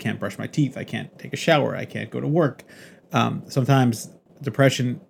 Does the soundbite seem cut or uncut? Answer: uncut